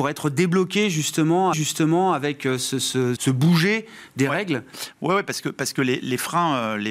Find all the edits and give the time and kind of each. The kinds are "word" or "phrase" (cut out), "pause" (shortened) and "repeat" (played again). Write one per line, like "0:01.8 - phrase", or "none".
0:01.5 - repeat
0:03.2 - word